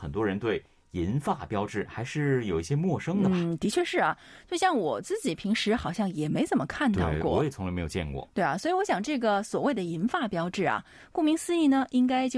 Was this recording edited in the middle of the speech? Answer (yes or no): no